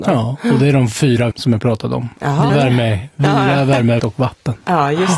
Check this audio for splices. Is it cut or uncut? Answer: cut